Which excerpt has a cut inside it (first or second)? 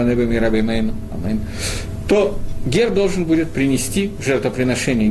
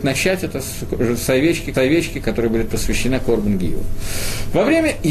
second